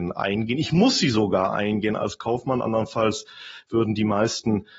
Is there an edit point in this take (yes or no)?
no